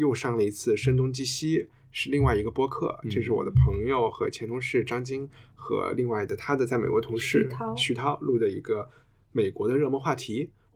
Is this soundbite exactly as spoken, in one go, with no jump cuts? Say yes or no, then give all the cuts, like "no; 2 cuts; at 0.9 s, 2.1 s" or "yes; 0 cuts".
yes; 0 cuts